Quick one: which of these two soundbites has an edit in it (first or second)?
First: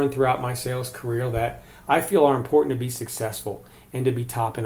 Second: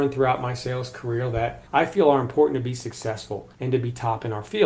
second